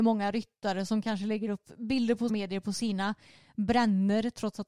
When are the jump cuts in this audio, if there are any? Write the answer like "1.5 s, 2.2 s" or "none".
2.3 s